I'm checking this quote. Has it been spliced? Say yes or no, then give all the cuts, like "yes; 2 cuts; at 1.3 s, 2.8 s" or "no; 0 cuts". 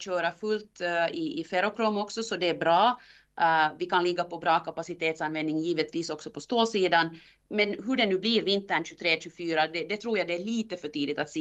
no; 0 cuts